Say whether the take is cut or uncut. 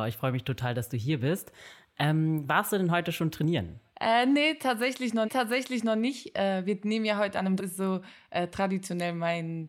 cut